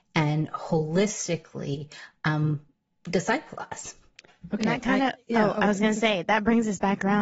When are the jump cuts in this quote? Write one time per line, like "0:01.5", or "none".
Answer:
none